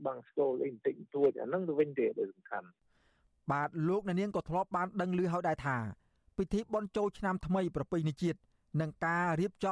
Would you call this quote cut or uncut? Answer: uncut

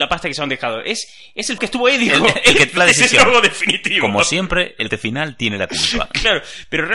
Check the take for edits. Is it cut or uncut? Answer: cut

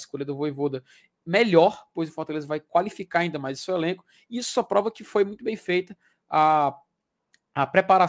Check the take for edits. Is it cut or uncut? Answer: uncut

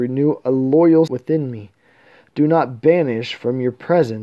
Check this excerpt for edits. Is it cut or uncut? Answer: cut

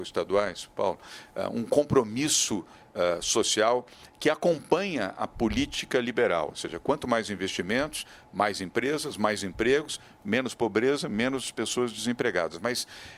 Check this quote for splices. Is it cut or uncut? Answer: uncut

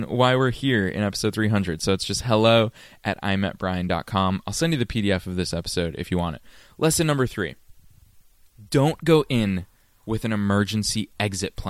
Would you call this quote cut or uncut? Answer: uncut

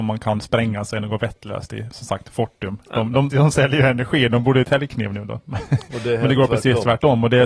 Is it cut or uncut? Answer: cut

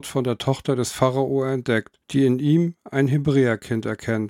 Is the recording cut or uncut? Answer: cut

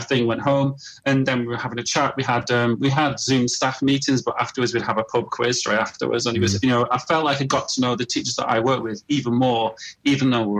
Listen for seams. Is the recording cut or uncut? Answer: uncut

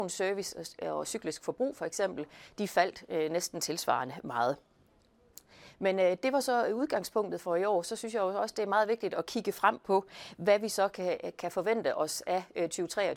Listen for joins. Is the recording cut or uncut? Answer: uncut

